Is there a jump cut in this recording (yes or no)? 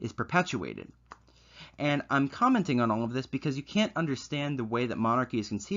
no